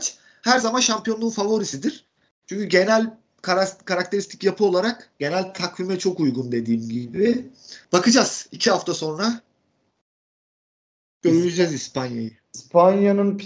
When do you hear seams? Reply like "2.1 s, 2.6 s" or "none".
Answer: 2.3 s, 5.1 s, 7.8 s